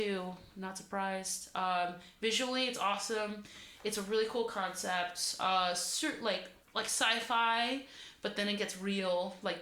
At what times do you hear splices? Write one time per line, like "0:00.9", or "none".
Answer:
0:06.6